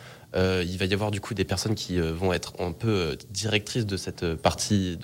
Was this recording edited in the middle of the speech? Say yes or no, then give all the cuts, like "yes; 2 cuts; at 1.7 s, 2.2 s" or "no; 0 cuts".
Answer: no; 0 cuts